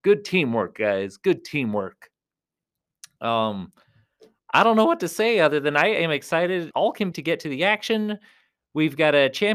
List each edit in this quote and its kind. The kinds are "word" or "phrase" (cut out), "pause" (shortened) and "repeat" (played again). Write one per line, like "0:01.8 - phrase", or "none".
0:06.7 - word
0:07.1 - word